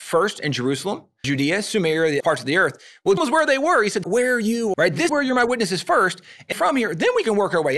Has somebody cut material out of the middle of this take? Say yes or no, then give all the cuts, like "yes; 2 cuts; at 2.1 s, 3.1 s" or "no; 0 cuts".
yes; 7 cuts; at 1.2 s, 2.2 s, 3.2 s, 4.0 s, 4.7 s, 5.1 s, 6.5 s